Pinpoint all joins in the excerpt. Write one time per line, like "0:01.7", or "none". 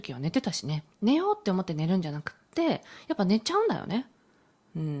0:00.9